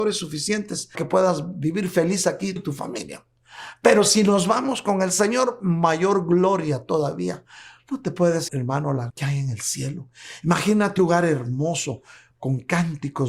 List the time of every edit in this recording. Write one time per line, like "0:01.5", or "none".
0:00.9
0:02.6
0:08.5
0:09.1
0:11.0